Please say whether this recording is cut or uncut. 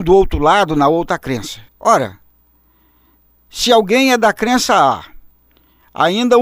cut